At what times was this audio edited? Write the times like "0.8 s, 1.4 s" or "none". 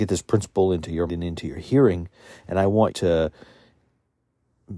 1.1 s, 2.9 s

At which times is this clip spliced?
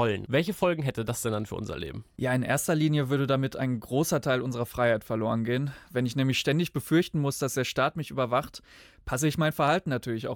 none

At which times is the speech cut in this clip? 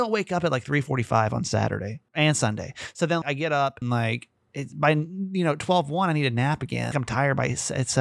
2.1 s, 3.2 s, 3.8 s, 4.4 s, 6.9 s

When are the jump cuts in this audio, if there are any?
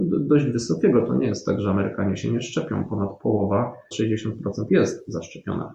3.9 s, 4.7 s

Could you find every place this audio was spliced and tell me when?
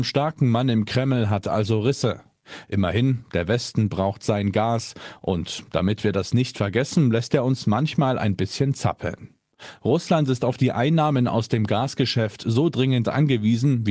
none

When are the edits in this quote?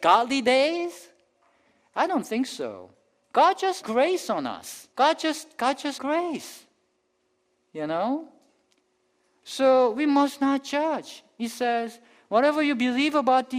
3.8 s, 4.9 s, 6.0 s

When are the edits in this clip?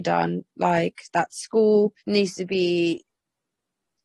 2.0 s

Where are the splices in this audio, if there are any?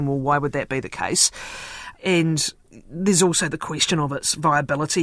1.9 s

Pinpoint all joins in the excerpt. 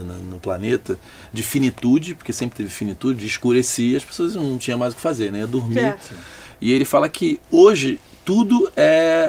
none

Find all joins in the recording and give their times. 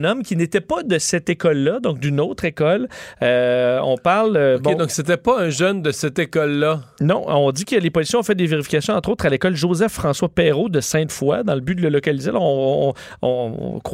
none

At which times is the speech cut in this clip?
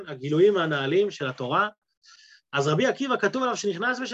none

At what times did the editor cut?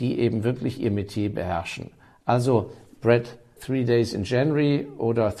3.6 s

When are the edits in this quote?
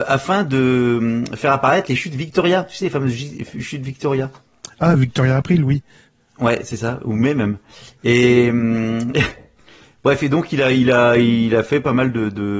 none

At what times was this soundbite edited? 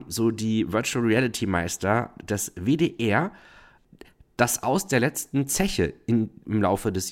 none

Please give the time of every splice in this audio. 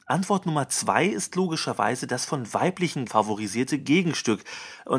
3.1 s

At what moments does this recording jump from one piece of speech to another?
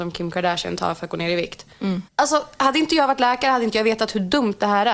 2.1 s

